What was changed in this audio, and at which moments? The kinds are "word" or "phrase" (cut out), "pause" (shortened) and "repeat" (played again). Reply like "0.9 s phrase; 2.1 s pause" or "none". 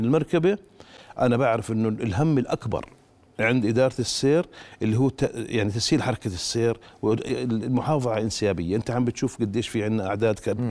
none